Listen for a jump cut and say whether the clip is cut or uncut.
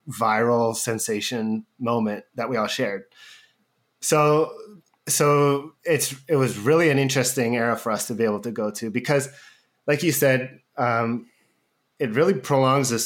uncut